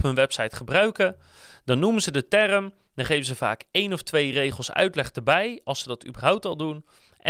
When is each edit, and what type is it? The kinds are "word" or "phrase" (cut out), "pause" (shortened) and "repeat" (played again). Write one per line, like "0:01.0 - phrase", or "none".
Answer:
none